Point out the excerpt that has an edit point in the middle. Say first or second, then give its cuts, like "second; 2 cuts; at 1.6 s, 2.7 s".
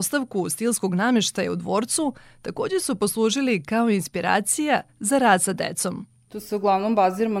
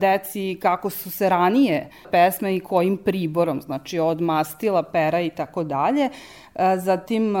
second; 1 cut; at 2.0 s